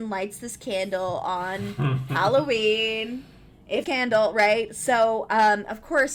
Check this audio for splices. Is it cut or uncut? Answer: cut